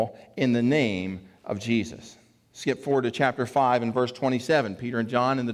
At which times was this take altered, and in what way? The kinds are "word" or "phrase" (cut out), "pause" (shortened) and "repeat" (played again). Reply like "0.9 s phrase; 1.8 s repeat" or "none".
none